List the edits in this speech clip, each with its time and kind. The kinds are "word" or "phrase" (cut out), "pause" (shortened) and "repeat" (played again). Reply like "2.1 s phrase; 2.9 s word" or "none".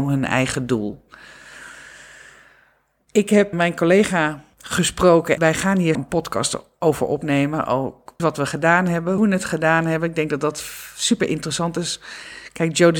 3.5 s word; 5.4 s word; 5.9 s word; 8.2 s word; 9.2 s word